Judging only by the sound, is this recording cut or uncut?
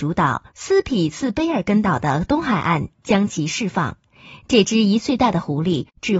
uncut